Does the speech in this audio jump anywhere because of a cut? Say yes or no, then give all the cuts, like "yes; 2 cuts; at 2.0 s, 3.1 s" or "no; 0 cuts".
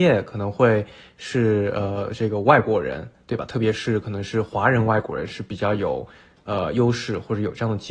no; 0 cuts